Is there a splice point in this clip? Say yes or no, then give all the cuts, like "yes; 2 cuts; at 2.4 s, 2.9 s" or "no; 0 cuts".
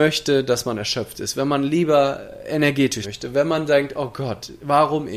yes; 1 cut; at 3.0 s